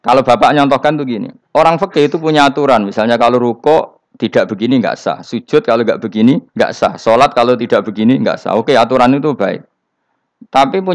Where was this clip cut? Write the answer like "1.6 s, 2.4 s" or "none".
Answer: 1.4 s, 6.5 s

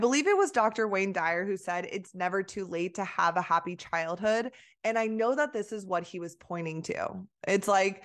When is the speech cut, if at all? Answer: none

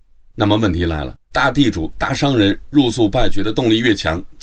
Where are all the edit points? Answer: 1.2 s

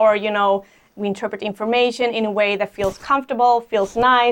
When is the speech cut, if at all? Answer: none

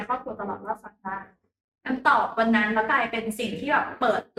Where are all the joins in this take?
none

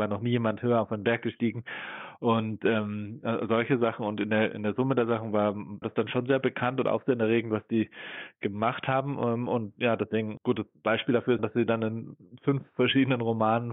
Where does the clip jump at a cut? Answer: 5.8 s, 10.4 s, 11.4 s

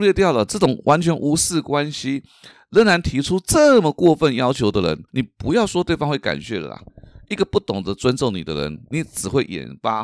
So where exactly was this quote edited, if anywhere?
5.1 s

